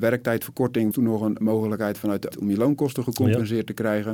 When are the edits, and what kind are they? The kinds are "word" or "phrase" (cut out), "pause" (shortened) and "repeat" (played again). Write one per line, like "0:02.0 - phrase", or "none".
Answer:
0:00.9 - word
0:01.4 - word
0:02.3 - word